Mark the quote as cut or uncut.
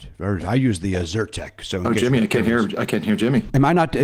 uncut